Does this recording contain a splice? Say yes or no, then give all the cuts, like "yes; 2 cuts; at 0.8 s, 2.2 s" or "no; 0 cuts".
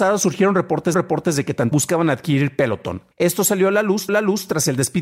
yes; 4 cuts; at 0.9 s, 1.7 s, 3.1 s, 4.1 s